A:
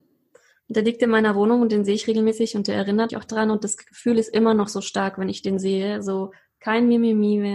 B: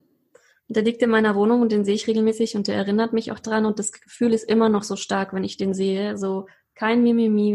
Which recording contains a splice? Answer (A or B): A